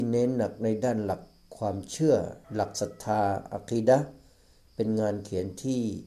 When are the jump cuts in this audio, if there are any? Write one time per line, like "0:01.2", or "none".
0:02.4